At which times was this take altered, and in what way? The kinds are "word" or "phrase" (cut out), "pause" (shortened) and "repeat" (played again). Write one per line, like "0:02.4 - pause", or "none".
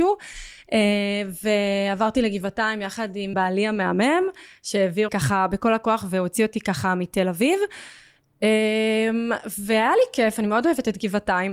0:03.3 - word
0:05.1 - word